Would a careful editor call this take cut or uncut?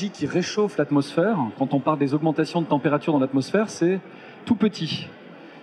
uncut